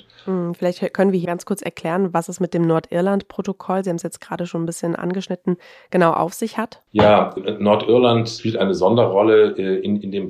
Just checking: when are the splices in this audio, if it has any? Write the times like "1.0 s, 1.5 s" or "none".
1.2 s, 5.0 s, 7.4 s